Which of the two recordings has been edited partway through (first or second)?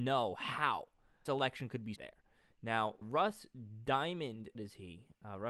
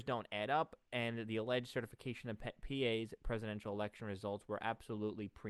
first